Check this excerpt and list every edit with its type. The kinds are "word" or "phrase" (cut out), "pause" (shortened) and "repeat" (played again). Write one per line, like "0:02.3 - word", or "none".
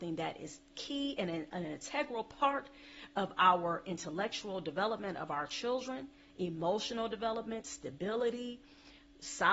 none